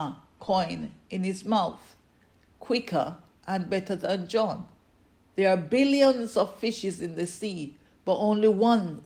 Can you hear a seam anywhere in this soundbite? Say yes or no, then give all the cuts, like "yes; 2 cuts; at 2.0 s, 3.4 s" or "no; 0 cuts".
no; 0 cuts